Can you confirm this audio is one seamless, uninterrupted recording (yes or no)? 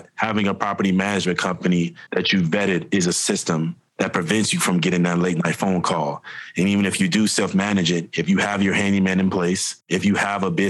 yes